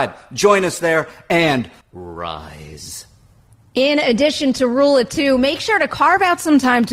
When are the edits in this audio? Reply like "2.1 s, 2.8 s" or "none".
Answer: 1.8 s